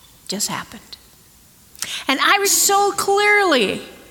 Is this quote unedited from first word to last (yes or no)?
no